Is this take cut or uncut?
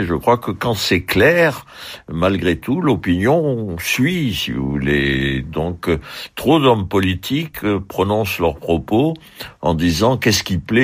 uncut